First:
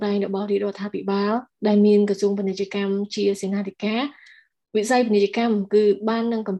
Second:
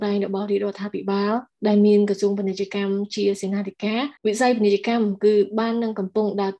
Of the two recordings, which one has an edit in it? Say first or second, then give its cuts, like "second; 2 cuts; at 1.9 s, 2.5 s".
second; 1 cut; at 4.2 s